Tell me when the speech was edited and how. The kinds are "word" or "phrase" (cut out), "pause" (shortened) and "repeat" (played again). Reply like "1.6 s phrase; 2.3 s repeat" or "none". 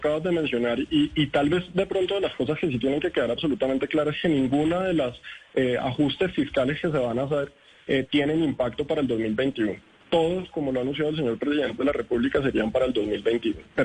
none